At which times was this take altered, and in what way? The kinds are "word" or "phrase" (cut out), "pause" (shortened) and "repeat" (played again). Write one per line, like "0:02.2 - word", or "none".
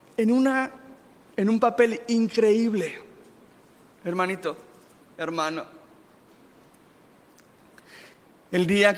none